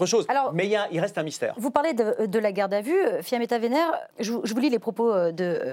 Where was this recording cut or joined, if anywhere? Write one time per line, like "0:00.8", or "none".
0:04.1